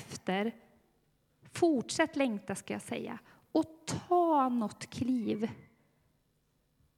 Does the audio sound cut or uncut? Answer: uncut